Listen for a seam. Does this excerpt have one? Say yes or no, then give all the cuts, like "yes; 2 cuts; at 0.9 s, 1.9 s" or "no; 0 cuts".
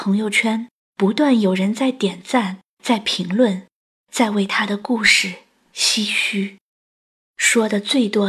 no; 0 cuts